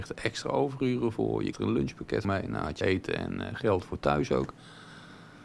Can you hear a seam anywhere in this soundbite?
yes; 3 cuts; at 1.5 s, 2.2 s, 2.8 s

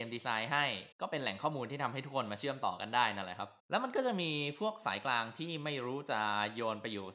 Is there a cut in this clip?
yes; 2 cuts; at 0.9 s, 3.6 s

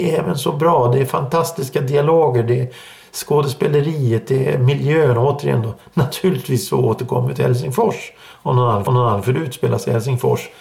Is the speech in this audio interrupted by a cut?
yes; 1 cut; at 8.9 s

